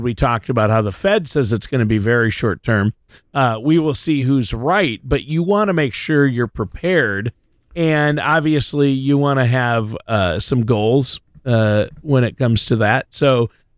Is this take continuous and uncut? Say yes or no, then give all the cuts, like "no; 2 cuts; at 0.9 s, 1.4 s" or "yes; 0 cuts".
yes; 0 cuts